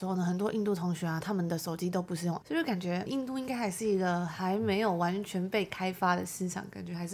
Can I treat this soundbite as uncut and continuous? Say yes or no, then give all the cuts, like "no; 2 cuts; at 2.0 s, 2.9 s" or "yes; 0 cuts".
no; 2 cuts; at 2.4 s, 3.1 s